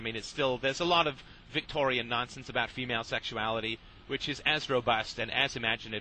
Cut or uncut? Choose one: uncut